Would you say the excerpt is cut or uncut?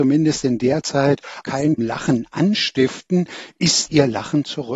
cut